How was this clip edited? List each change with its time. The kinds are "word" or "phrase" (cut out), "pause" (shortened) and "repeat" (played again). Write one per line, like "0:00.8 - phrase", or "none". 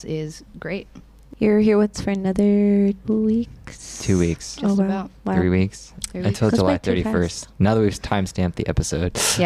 0:01.9 - word
0:03.0 - word

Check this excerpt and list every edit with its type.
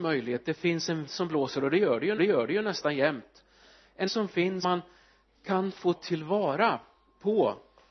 0:01.1 - word
0:02.2 - repeat
0:04.1 - word
0:04.6 - word
0:05.9 - word

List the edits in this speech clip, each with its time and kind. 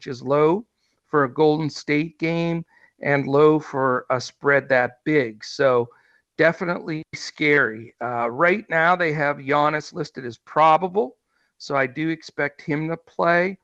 none

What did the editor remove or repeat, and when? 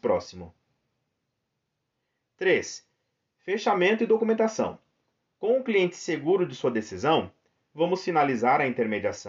none

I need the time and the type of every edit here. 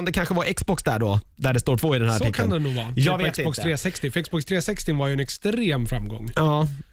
0:01.8 - word

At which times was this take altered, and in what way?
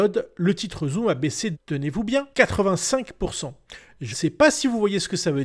0:01.5 - word
0:02.3 - pause
0:04.1 - word

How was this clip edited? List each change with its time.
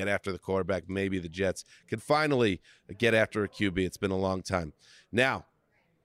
none

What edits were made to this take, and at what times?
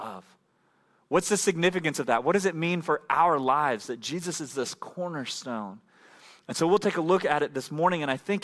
none

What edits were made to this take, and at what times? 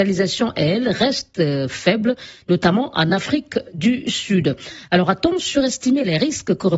none

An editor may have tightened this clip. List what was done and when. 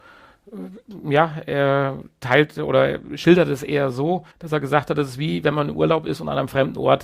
0:04.3 - pause

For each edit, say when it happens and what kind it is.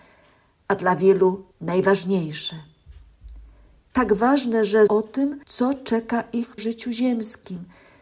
0:01.5 - pause
0:04.9 - word
0:05.4 - pause
0:06.6 - word

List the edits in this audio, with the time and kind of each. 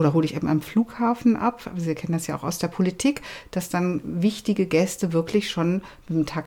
none

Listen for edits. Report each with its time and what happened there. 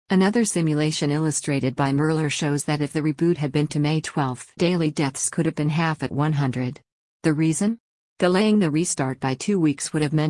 0:03.7 - word
0:04.6 - word

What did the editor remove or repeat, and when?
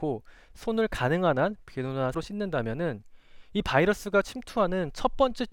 0:02.1 - word

